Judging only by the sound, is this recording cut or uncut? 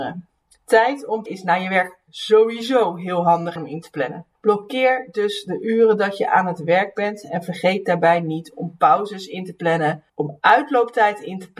cut